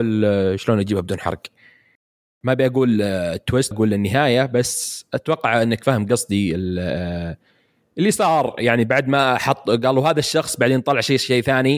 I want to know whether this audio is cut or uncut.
cut